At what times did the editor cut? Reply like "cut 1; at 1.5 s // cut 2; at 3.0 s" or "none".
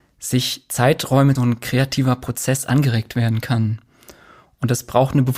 cut 1; at 1.4 s